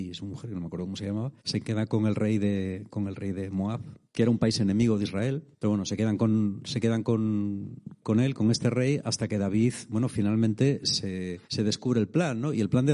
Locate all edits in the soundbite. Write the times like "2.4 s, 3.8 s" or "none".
1.4 s, 4.0 s, 5.5 s, 11.4 s